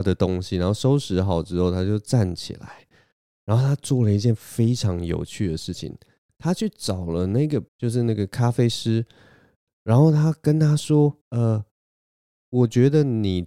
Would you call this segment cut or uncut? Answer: cut